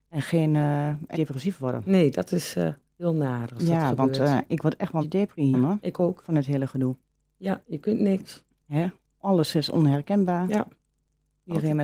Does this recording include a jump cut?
yes; 3 cuts; at 1.1 s, 5.0 s, 5.5 s

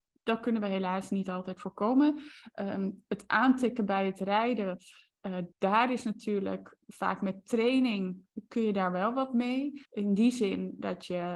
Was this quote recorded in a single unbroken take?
no; 3 cuts; at 5.5 s, 6.8 s, 9.9 s

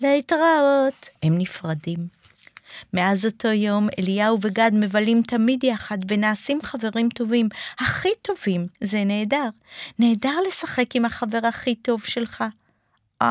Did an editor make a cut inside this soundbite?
yes; 2 cuts; at 1.1 s, 8.7 s

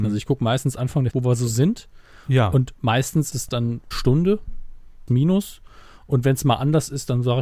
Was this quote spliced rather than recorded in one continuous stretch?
yes; 4 cuts; at 1.1 s, 3.3 s, 3.9 s, 5.1 s

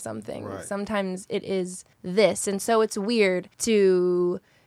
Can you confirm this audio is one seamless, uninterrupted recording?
no; 2 cuts; at 1.9 s, 3.5 s

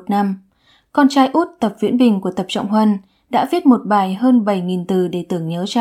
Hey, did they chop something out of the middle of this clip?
no; 0 cuts

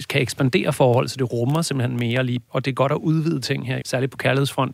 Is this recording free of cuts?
no; 2 cuts; at 2.5 s, 3.8 s

